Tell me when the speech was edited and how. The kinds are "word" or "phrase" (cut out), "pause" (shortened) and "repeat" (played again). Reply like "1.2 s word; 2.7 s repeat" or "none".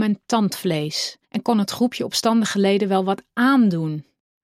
1.2 s pause